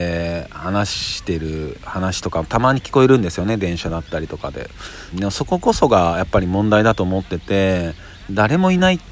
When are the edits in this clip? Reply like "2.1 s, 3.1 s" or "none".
5.1 s